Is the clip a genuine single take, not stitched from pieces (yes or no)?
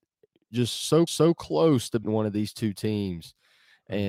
no